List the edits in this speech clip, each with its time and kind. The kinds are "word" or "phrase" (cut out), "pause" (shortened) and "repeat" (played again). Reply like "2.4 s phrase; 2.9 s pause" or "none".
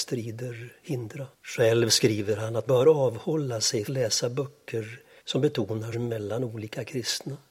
1.3 s pause; 2.7 s word; 3.9 s phrase; 5.2 s pause; 5.9 s word